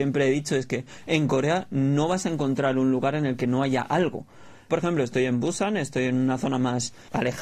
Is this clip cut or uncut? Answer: cut